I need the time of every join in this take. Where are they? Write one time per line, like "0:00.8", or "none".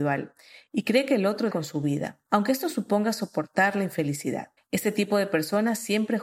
0:01.5
0:02.3
0:04.6

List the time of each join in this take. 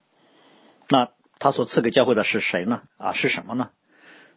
0:02.9

